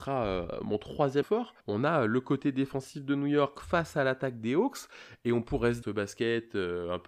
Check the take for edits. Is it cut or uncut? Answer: cut